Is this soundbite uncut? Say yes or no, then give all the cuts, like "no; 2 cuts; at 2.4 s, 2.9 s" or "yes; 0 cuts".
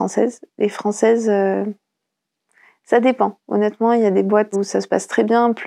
no; 1 cut; at 4.5 s